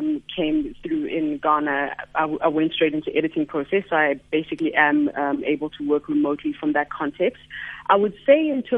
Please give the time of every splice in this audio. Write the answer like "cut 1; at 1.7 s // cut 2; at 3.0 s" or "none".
none